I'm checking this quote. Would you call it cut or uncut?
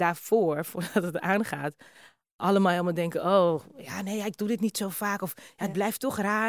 uncut